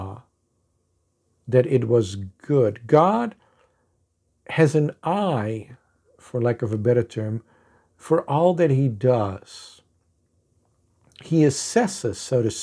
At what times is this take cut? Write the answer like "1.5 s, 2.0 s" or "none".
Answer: none